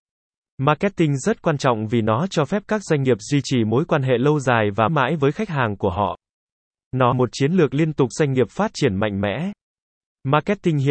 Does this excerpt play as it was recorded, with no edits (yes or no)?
no